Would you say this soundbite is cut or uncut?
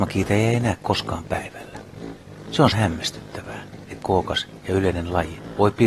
cut